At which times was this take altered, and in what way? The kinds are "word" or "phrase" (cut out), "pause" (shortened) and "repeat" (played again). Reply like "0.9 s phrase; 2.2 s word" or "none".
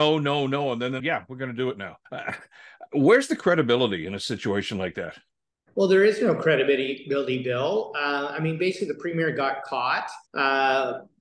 1.0 s phrase; 2.1 s pause; 5.5 s pause; 10.3 s pause